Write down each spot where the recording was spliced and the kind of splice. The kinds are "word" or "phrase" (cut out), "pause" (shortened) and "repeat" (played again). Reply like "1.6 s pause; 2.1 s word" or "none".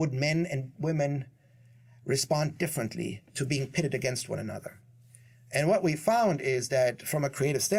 none